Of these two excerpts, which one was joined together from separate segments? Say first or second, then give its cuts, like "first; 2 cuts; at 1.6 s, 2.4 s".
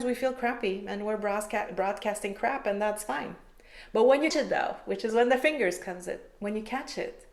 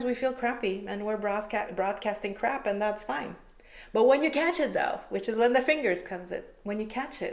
first; 1 cut; at 4.3 s